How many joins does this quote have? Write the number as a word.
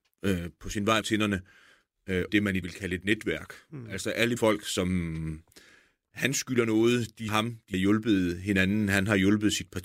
six